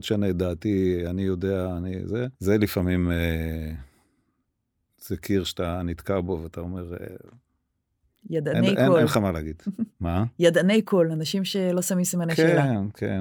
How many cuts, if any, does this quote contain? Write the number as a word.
one